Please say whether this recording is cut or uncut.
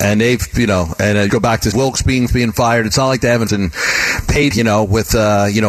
cut